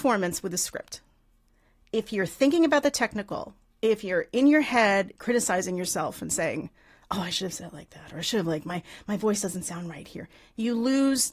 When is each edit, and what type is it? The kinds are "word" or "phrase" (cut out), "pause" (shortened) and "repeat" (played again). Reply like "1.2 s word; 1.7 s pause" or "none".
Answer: none